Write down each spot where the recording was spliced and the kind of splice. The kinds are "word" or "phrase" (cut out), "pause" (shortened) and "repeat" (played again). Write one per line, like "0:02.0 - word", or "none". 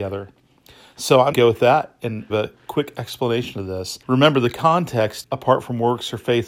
0:01.3 - word
0:02.3 - phrase
0:04.0 - pause
0:05.2 - phrase